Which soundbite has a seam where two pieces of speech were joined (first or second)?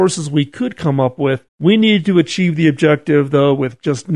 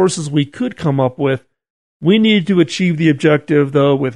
first